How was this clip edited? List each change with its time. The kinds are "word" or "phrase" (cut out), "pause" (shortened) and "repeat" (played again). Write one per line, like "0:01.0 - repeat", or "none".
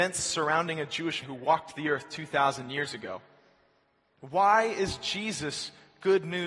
0:01.2 - word

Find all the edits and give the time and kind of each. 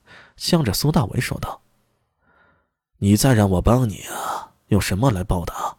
none

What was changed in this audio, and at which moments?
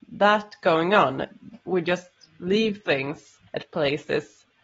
0:03.5 - pause

